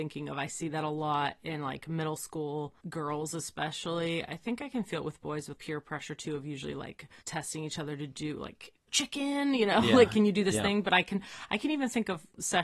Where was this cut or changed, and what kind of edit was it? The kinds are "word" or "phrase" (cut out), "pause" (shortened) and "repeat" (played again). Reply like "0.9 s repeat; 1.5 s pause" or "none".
2.8 s pause; 5.5 s word; 7.2 s pause; 8.9 s phrase